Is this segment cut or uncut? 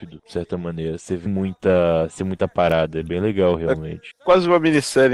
cut